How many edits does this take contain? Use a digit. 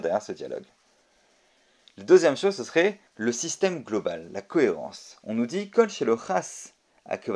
1